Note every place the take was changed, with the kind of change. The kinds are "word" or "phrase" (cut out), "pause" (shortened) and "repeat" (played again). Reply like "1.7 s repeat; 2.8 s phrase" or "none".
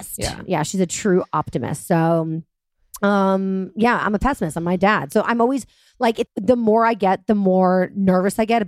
6.3 s word